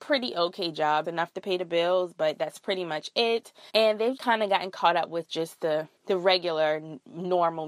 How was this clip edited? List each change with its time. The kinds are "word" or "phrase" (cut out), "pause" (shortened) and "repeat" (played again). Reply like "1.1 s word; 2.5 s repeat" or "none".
1.0 s phrase; 3.7 s pause; 4.2 s word; 6.0 s pause